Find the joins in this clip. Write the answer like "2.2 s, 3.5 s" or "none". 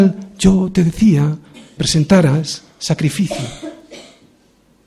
1.8 s